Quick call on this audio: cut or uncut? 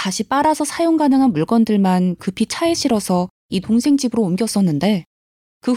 uncut